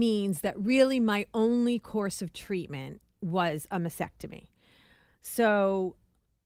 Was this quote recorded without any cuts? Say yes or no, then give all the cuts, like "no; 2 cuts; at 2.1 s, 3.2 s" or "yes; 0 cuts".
yes; 0 cuts